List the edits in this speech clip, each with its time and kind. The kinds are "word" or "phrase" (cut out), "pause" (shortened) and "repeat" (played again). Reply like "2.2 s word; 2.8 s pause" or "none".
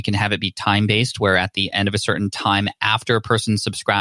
none